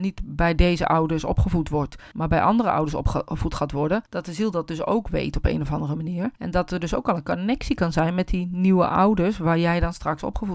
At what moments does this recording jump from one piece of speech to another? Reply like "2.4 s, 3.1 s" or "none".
2.1 s, 4.1 s, 6.3 s